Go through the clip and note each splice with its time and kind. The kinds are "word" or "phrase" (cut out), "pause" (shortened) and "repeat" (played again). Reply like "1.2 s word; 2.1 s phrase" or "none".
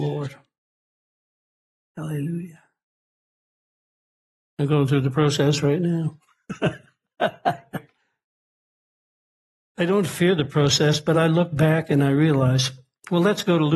none